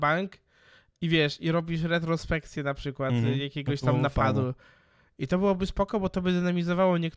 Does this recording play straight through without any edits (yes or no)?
yes